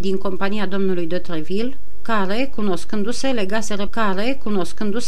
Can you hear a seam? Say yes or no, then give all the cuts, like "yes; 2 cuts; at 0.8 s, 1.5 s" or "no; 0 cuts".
yes; 1 cut; at 3.9 s